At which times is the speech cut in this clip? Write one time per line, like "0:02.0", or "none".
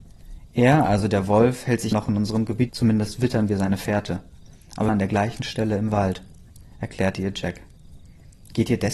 0:01.9
0:02.7
0:04.9